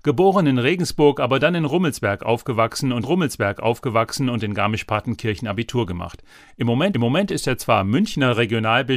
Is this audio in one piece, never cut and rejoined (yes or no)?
no